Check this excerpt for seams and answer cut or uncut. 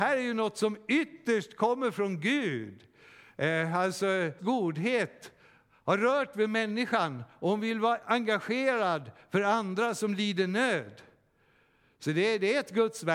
cut